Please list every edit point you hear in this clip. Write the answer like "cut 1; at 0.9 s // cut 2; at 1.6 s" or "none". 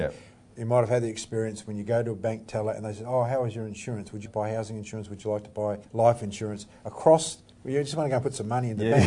cut 1; at 4.3 s // cut 2; at 5.8 s